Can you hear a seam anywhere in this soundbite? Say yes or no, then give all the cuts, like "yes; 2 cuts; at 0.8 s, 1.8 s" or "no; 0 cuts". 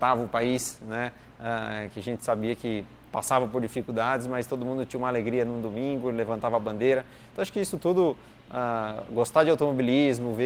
no; 0 cuts